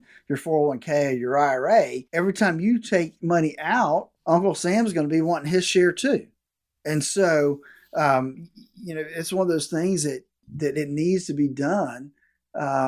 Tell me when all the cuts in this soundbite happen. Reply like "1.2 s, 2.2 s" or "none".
2.1 s, 4.2 s